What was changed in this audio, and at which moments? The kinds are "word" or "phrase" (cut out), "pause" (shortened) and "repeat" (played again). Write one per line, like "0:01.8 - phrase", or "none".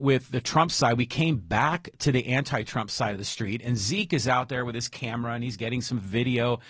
none